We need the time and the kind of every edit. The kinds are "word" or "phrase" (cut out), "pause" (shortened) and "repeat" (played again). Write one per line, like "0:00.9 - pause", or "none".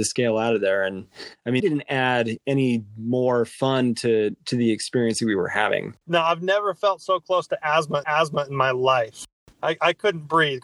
0:01.6 - word
0:06.0 - pause
0:08.0 - repeat